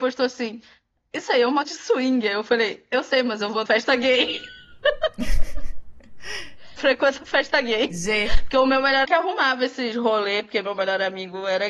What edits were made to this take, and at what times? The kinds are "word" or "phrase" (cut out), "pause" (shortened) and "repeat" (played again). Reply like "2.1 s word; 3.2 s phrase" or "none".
1.6 s word; 3.7 s word; 6.8 s word; 9.0 s word